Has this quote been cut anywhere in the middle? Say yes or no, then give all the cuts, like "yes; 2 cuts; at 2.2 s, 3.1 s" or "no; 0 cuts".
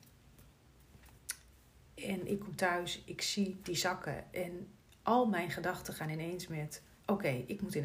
no; 0 cuts